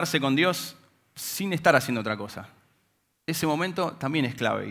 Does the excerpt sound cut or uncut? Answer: uncut